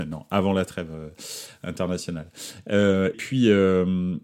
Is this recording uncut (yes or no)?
no